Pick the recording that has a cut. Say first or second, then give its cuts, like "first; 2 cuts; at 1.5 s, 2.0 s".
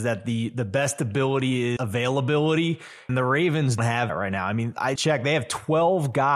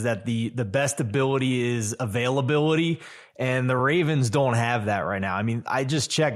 first; 5 cuts; at 1.8 s, 3.1 s, 3.8 s, 4.1 s, 5.0 s